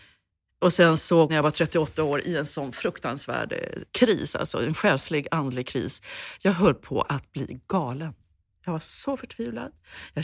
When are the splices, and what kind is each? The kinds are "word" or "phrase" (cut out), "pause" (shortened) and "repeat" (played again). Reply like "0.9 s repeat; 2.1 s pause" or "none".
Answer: 1.3 s phrase